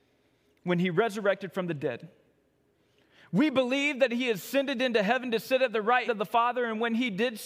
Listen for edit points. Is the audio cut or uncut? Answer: cut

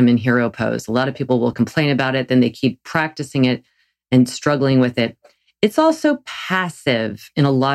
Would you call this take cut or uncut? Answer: uncut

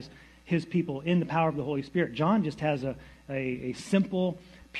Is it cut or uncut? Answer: uncut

